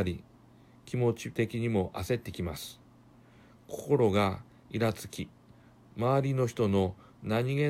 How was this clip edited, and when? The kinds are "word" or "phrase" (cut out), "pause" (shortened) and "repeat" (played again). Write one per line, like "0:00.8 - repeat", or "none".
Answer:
none